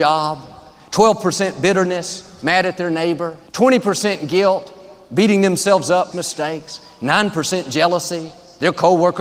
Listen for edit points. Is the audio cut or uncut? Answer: cut